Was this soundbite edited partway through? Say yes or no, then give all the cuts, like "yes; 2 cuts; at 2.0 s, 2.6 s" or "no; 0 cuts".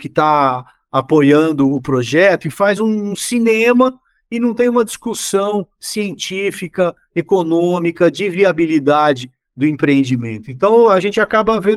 no; 0 cuts